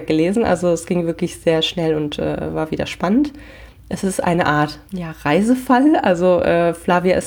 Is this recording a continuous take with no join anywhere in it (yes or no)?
no